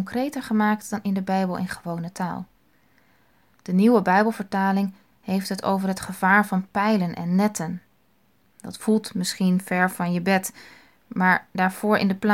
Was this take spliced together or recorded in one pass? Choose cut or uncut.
uncut